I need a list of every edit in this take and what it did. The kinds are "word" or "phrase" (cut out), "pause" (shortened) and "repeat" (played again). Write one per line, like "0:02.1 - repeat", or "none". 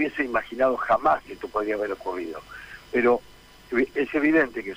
0:01.2 - phrase